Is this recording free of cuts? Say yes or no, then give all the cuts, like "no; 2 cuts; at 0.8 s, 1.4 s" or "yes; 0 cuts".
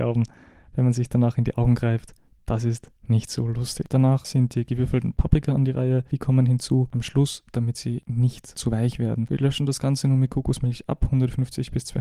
yes; 0 cuts